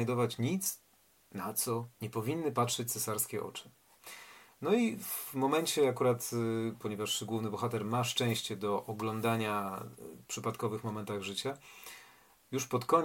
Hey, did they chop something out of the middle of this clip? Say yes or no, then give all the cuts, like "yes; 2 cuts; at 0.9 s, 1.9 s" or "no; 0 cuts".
yes; 3 cuts; at 1.9 s, 6.8 s, 10.2 s